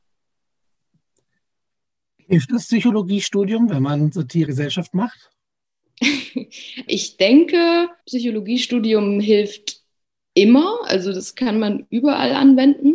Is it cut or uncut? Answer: cut